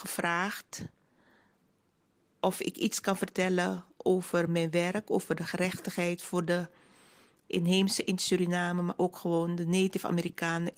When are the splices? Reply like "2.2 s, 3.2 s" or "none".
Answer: none